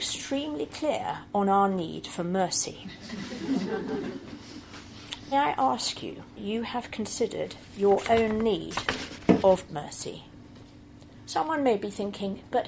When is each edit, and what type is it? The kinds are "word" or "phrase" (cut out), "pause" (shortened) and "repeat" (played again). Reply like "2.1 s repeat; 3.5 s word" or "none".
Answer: 5.3 s word; 6.4 s word; 9.7 s word